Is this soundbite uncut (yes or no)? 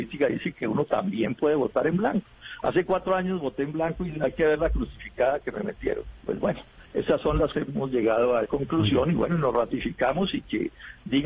no